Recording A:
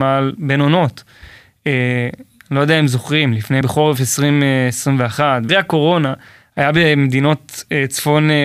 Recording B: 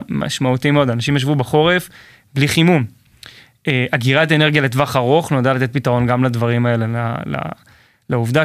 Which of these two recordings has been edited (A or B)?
A